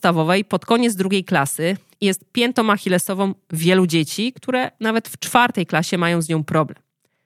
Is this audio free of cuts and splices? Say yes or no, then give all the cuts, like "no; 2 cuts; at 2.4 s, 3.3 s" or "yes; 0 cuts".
yes; 0 cuts